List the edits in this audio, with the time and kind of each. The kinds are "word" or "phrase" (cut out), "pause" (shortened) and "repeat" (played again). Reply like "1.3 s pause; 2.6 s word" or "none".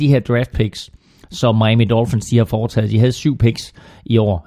none